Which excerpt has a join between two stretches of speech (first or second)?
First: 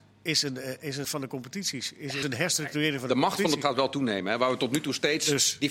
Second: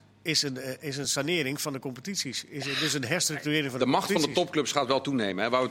first